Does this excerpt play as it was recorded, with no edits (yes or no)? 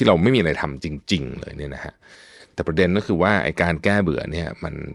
yes